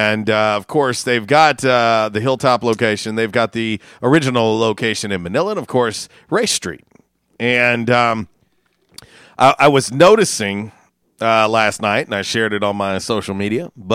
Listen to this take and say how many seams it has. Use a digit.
0